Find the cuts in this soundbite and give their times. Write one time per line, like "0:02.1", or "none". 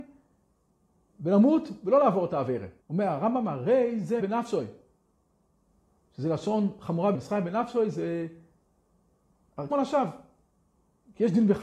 0:02.8
0:04.2
0:07.1
0:09.7

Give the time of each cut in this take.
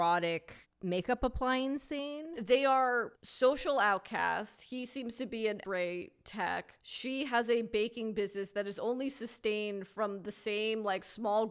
0:05.6

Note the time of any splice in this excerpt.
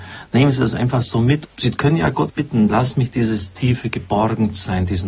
0:01.5
0:02.3

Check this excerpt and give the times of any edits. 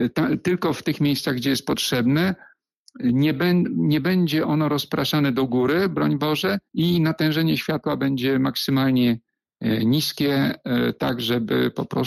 0:06.7

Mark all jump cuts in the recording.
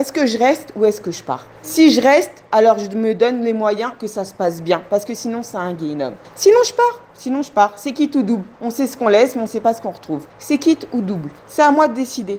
0:01.5
0:06.2
0:08.5
0:10.3
0:11.4

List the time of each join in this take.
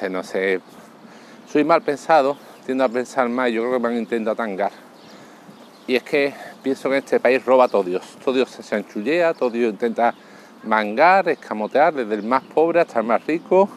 none

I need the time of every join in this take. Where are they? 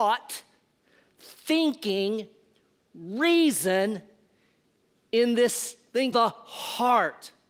0:06.1

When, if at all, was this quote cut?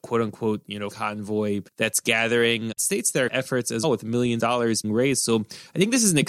0:00.9
0:01.7
0:02.8
0:03.3
0:03.8
0:04.4
0:04.8

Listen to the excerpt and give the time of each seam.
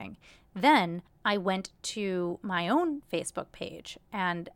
0:01.1

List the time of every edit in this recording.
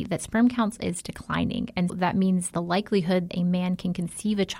0:01.9
0:02.5
0:03.3

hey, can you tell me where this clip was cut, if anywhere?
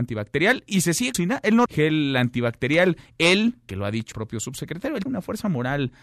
0:01.1
0:01.7
0:03.7
0:04.1
0:05.1

